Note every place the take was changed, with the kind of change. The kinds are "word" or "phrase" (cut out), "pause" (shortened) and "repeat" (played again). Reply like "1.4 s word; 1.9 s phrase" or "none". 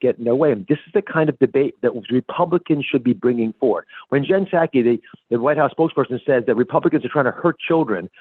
none

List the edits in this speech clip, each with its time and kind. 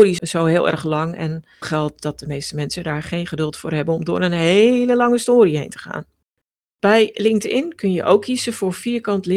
1.6 s word; 6.2 s pause

